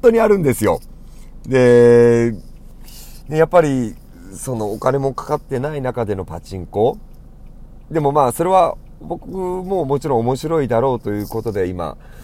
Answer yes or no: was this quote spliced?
no